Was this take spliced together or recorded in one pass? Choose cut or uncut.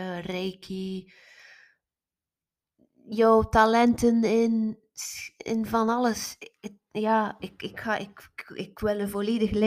uncut